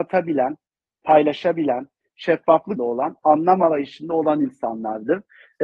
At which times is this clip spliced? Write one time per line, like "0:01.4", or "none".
0:02.8